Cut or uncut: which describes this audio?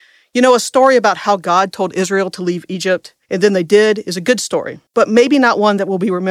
cut